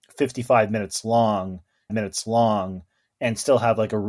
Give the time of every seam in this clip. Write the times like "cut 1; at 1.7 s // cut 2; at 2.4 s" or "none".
cut 1; at 1.9 s